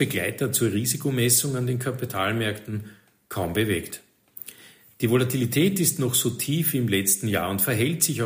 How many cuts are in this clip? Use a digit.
0